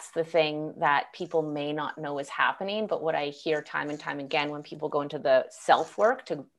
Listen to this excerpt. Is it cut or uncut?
uncut